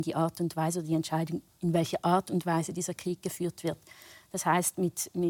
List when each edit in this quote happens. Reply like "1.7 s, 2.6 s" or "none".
none